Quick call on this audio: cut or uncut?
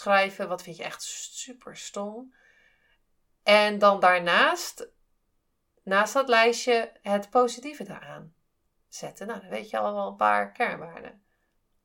uncut